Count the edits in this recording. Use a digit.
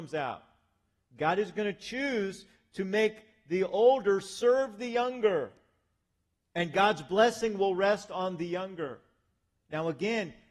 0